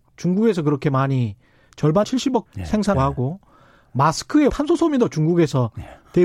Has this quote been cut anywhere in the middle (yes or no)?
yes